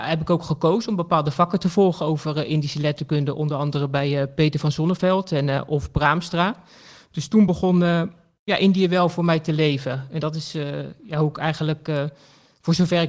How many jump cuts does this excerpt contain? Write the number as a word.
zero